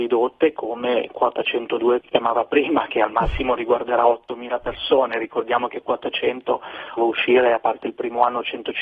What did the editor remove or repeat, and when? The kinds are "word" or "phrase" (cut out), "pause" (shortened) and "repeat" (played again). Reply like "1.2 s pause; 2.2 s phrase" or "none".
2.0 s word; 7.0 s phrase